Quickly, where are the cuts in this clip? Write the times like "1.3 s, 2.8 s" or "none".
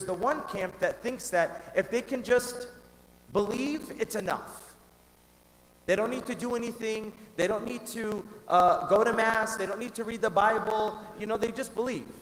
none